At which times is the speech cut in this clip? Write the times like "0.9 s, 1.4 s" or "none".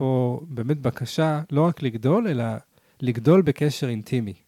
none

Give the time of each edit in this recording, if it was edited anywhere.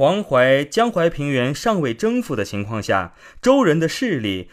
none

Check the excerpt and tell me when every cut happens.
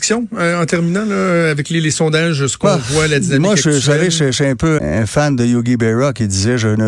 4.8 s

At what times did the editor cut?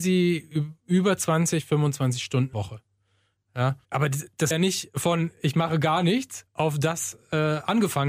2.5 s, 3.8 s, 4.5 s, 6.5 s

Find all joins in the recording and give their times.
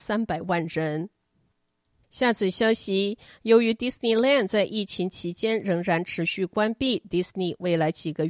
1.5 s

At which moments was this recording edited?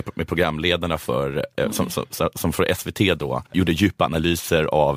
3.5 s

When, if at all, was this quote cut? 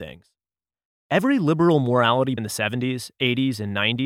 2.4 s

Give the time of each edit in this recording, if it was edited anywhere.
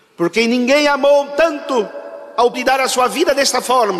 2.5 s

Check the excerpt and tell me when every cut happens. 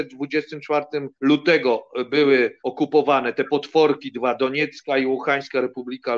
1.1 s, 2.6 s

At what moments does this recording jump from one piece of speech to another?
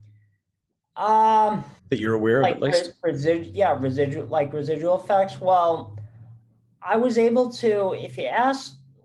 1.8 s

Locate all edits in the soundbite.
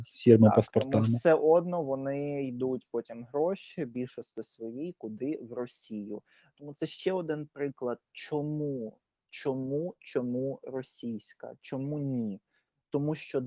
none

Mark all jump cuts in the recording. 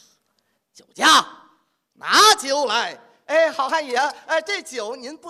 none

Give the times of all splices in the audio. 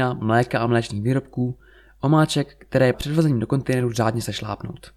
2.9 s

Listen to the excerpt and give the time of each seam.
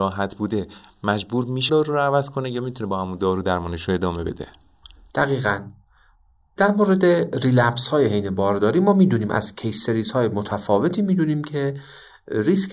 1.7 s

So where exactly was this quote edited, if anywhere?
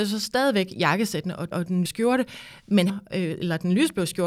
1.5 s, 1.9 s, 2.9 s

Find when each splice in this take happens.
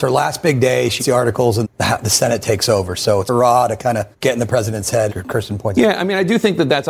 1.0 s, 1.6 s, 3.3 s, 4.1 s, 5.1 s

